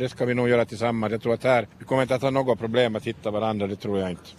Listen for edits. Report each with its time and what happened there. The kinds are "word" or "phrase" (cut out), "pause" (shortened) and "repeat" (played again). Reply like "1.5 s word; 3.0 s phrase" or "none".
1.7 s pause